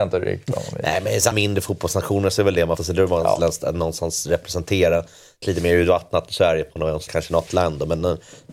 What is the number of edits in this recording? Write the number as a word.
six